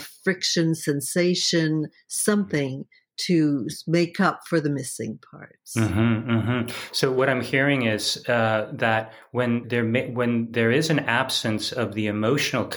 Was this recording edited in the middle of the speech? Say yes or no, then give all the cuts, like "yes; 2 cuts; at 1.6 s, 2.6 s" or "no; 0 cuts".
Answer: yes; 1 cut; at 9.6 s